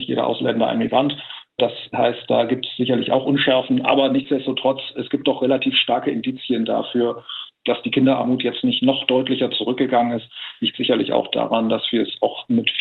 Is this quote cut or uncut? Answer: uncut